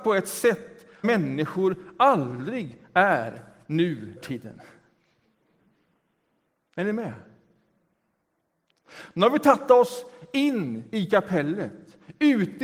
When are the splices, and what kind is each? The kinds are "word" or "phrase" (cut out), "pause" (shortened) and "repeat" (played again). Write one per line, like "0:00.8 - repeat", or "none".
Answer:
0:01.0 - word
0:04.2 - word